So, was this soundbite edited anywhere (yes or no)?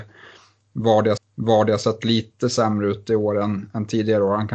yes